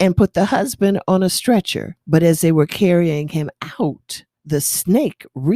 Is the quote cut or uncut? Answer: cut